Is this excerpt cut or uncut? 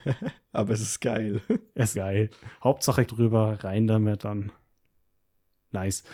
cut